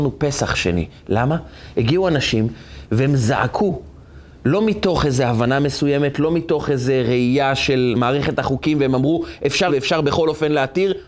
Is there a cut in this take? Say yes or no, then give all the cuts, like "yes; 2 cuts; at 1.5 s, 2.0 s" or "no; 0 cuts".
yes; 1 cut; at 9.7 s